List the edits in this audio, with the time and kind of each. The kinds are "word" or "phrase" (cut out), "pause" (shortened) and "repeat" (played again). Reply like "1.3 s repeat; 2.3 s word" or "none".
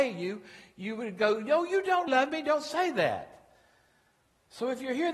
2.1 s word